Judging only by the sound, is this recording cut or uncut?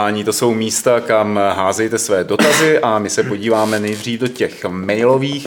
uncut